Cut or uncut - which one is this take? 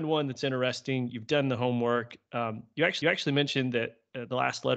cut